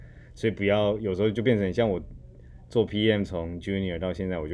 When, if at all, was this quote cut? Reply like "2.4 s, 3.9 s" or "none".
none

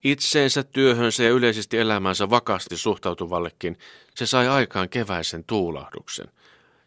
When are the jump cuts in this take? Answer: 2.7 s

